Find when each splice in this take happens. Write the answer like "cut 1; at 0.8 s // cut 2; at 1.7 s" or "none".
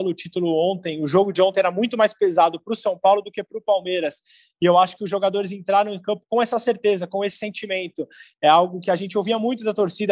none